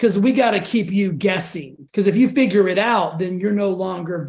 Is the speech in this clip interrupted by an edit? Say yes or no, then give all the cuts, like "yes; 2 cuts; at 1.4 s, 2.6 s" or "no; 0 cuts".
yes; 1 cut; at 1.9 s